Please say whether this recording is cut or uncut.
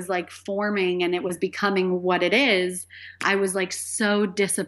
uncut